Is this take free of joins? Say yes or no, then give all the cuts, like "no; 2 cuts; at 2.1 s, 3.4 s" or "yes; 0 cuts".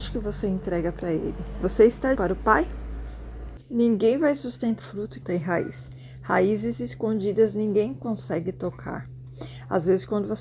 no; 4 cuts; at 2.1 s, 3.6 s, 4.8 s, 5.2 s